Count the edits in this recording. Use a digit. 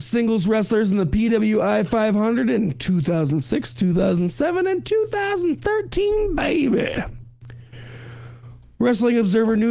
0